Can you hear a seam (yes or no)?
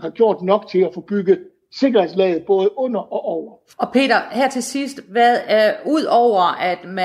no